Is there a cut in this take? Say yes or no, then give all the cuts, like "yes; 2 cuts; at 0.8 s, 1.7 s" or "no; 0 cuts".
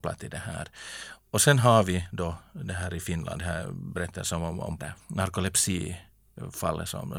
yes; 1 cut; at 4.8 s